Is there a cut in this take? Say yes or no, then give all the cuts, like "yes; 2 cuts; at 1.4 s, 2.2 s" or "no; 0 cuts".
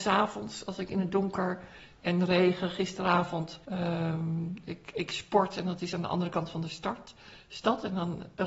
yes; 1 cut; at 3.6 s